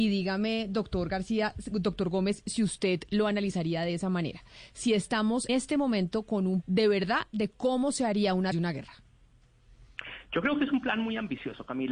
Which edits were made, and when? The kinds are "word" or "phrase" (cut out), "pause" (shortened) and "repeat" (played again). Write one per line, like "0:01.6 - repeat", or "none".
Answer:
0:05.5 - word
0:06.6 - word
0:08.5 - phrase